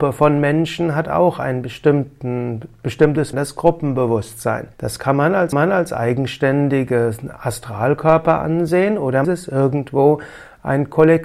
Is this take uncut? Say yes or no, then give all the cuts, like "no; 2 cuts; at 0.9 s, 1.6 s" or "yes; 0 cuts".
no; 4 cuts; at 3.3 s, 4.7 s, 5.5 s, 9.2 s